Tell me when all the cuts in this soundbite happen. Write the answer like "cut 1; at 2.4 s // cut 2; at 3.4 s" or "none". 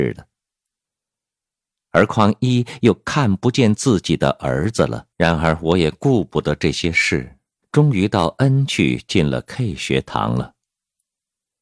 cut 1; at 5.1 s // cut 2; at 7.6 s